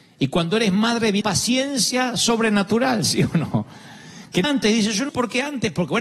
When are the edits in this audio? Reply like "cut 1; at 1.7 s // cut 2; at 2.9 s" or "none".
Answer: cut 1; at 1.2 s // cut 2; at 4.4 s // cut 3; at 5.1 s